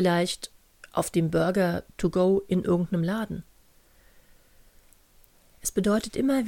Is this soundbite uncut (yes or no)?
yes